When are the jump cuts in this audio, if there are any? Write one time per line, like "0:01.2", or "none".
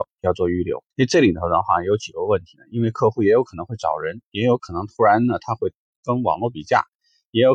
0:00.9

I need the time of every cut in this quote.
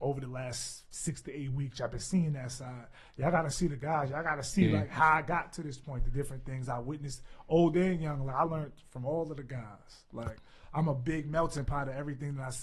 none

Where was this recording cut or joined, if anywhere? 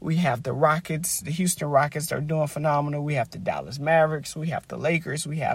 none

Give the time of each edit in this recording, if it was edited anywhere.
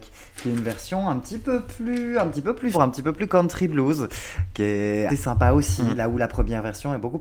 0:02.7
0:05.1

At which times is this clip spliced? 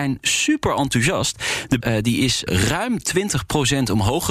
0:01.8
0:02.5

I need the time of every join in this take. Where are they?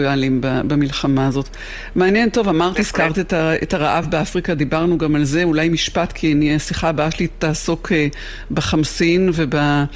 none

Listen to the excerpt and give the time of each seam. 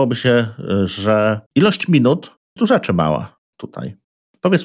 0:01.5
0:02.6

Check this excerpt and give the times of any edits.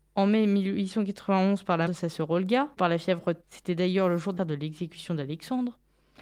0:01.9
0:02.8
0:03.4
0:04.4

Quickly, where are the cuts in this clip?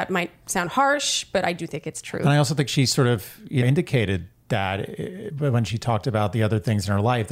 0:03.6

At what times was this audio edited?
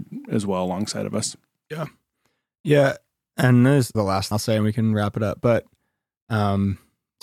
0:03.9
0:04.3

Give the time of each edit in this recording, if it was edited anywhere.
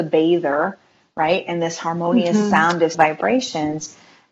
0:02.9

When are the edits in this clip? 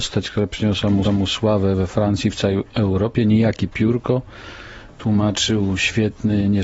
0:01.0

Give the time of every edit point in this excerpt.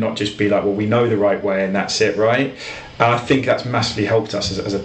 none

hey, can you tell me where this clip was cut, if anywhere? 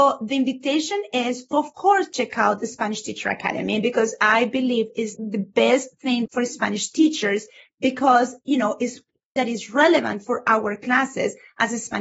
0:01.5
0:05.1
0:06.3
0:08.4
0:09.4

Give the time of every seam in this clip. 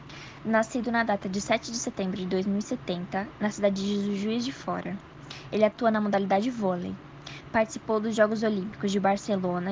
none

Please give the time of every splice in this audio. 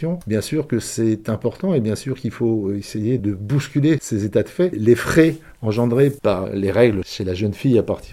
none

